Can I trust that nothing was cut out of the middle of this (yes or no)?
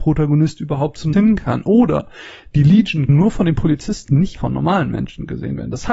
no